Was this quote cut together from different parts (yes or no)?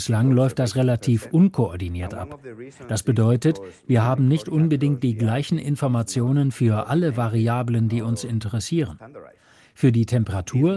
no